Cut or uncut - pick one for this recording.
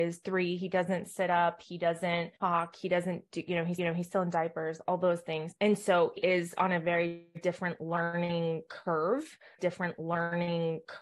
cut